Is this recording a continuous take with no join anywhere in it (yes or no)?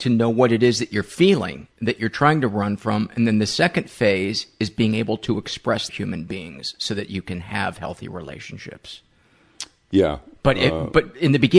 no